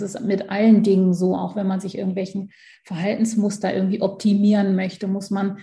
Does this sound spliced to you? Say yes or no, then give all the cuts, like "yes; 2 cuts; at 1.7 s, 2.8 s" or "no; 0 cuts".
no; 0 cuts